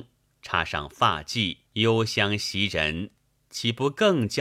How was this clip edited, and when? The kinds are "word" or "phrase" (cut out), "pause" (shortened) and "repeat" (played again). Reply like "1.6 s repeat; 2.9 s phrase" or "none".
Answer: 1.6 s pause